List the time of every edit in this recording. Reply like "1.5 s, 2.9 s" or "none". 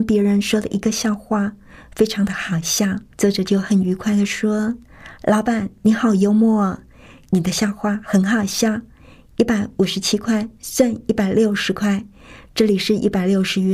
3.1 s